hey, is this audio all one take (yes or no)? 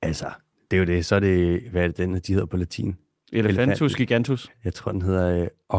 yes